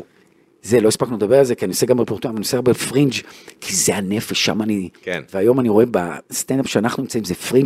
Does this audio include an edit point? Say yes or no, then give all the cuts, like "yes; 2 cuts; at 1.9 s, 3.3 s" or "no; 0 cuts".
yes; 1 cut; at 5.0 s